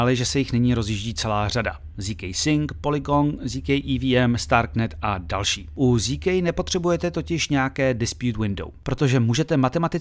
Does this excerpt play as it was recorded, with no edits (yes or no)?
yes